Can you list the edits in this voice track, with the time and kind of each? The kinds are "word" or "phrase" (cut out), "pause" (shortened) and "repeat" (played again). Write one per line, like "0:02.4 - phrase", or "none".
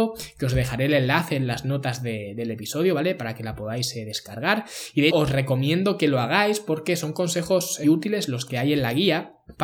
0:05.1 - word
0:07.8 - word